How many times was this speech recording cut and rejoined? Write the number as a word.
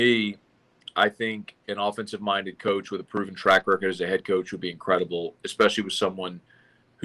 one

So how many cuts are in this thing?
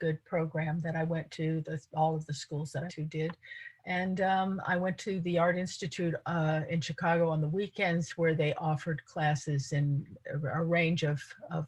two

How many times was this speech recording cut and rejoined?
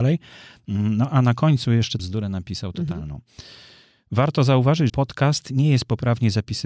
two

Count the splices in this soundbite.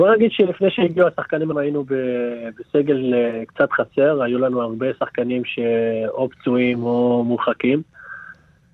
one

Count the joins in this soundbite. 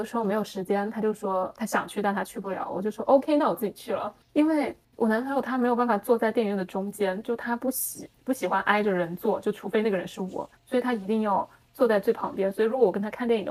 four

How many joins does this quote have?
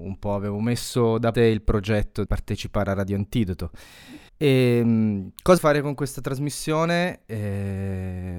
four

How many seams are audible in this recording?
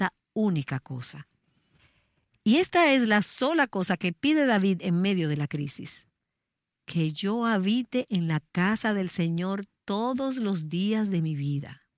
zero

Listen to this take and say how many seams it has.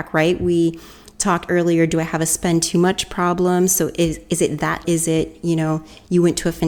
two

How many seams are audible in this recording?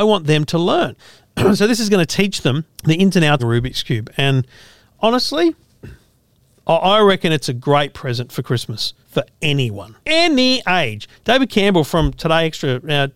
six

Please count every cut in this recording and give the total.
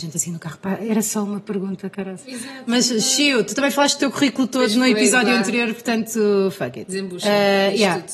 zero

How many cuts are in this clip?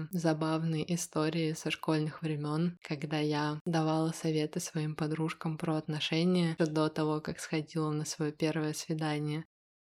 one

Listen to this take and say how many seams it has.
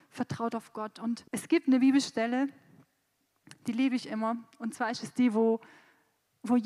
one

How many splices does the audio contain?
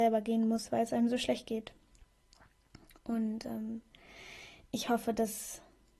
zero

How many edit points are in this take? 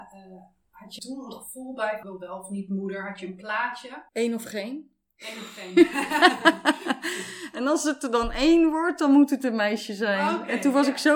three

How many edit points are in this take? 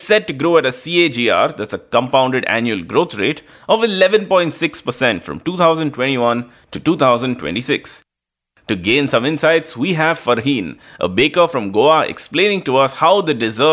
zero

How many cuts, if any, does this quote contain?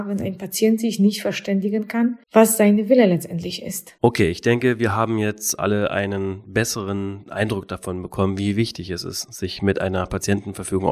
two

